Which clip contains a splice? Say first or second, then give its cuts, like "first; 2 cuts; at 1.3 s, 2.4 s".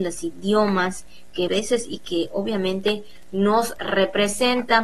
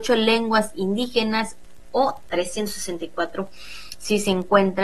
first; 1 cut; at 1.5 s